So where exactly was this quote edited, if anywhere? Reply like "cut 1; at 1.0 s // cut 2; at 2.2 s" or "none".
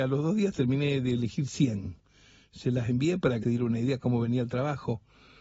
cut 1; at 3.4 s